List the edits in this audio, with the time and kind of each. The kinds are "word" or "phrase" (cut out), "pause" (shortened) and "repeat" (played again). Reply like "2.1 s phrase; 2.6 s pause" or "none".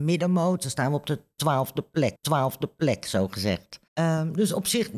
2.2 s repeat; 3.9 s pause